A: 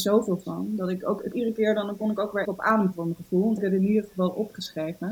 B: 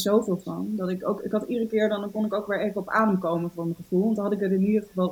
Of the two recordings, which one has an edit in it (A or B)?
A